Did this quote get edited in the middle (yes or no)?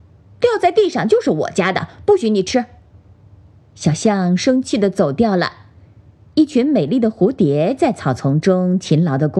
no